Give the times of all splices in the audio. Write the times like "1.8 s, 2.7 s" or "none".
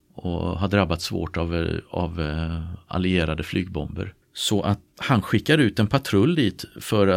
4.2 s, 4.9 s

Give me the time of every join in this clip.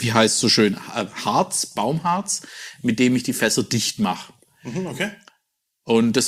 1.7 s

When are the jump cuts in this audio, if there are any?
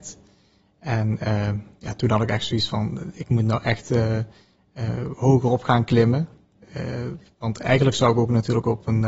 none

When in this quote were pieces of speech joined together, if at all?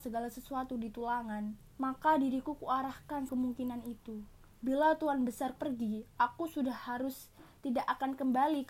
1.7 s, 3.3 s, 4.5 s, 5.6 s

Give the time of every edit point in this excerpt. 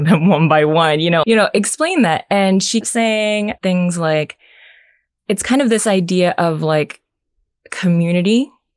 1.2 s, 2.8 s, 3.6 s, 5.2 s

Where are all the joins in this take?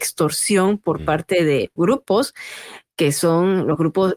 1.8 s

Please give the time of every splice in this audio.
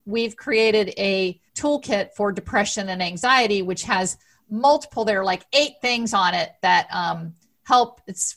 1.5 s

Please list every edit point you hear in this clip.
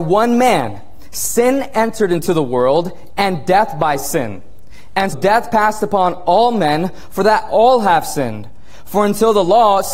5.1 s

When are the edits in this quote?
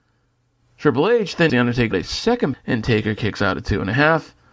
1.5 s, 1.9 s, 2.5 s

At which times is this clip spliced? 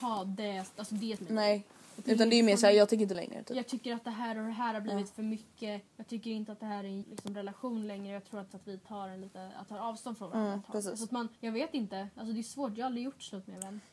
1.2 s, 3.1 s, 5.9 s, 7.0 s, 8.5 s, 9.7 s, 11.4 s

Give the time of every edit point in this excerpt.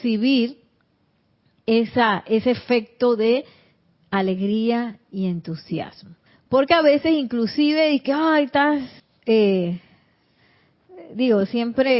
6.3 s, 9.0 s

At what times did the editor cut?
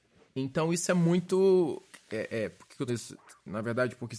2.9 s

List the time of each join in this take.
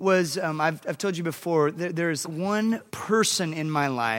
2.2 s, 2.9 s

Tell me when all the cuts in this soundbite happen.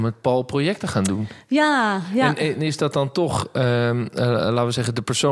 none

